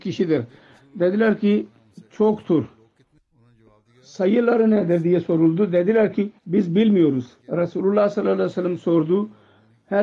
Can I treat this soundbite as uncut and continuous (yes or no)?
no